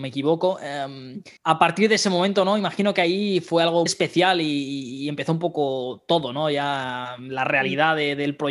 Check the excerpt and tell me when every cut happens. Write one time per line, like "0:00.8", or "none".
0:01.4
0:03.9